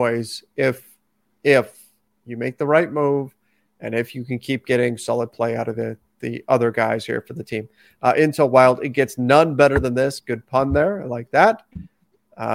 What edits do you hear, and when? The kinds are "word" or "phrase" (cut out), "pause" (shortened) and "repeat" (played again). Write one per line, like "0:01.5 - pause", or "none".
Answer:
none